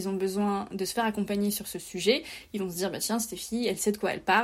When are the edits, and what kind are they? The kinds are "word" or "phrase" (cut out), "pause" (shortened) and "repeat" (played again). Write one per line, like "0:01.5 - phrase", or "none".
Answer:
none